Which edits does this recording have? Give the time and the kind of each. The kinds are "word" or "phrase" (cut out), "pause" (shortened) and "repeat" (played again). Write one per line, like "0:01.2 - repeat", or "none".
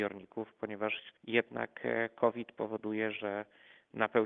0:01.2 - pause